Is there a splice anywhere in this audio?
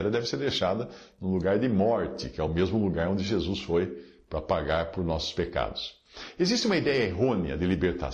no; 0 cuts

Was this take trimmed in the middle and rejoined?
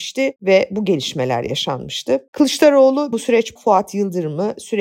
yes; 2 cuts; at 3.1 s, 3.6 s

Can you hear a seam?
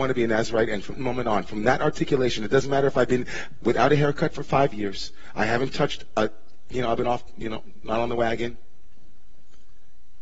yes; 1 cut; at 0.9 s

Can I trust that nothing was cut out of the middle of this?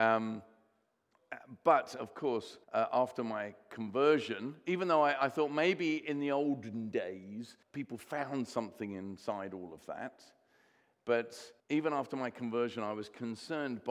no; 3 cuts; at 2.6 s, 7.6 s, 11.6 s

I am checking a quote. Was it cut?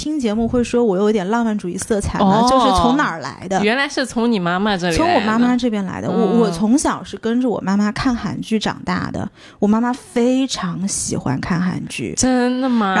no; 0 cuts

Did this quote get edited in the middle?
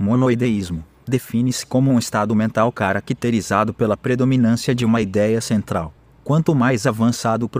no; 0 cuts

